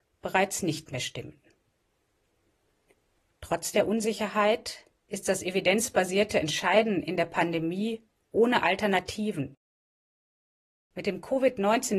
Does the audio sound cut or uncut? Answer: uncut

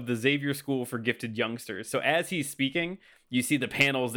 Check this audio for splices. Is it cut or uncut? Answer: uncut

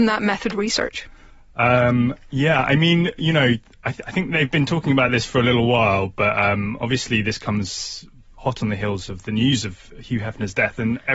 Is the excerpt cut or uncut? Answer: uncut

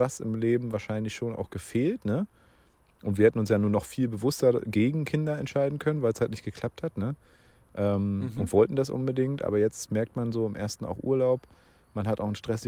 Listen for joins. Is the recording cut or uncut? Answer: uncut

